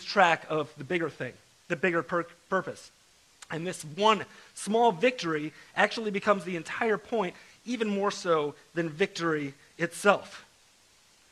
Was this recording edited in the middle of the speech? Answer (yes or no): no